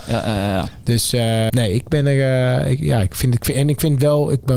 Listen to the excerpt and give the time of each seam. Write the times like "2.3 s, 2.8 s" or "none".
1.5 s